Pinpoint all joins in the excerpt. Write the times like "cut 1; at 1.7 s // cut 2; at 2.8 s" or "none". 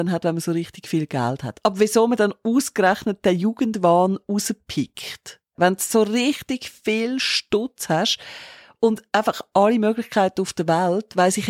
none

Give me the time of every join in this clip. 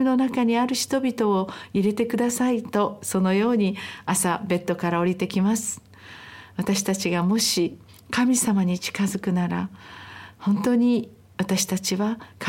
cut 1; at 7.9 s

